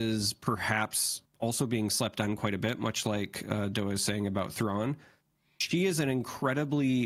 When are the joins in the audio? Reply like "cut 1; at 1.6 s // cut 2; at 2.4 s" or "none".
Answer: none